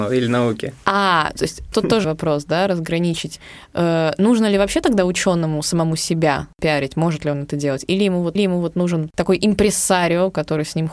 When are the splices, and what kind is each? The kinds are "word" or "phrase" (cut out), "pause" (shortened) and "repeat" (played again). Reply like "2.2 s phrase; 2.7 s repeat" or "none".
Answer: 1.7 s word; 2.0 s word; 8.4 s repeat